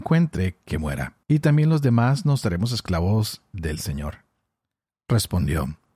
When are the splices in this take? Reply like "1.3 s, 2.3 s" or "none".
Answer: 1.2 s

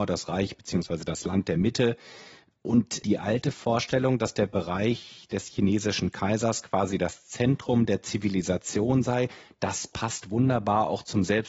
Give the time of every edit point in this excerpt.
none

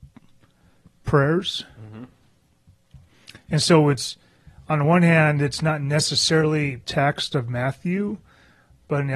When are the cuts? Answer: 6.8 s

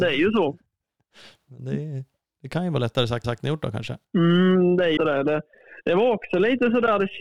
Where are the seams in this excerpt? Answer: 3.2 s, 4.0 s, 5.0 s

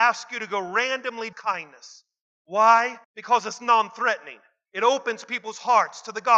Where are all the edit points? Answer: 1.3 s, 3.0 s

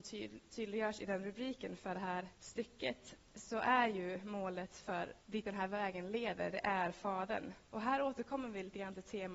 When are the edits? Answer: 2.4 s, 5.2 s, 7.6 s

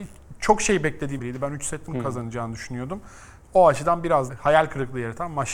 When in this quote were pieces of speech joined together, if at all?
1.2 s, 1.9 s, 4.3 s

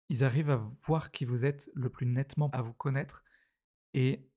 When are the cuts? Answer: 2.5 s

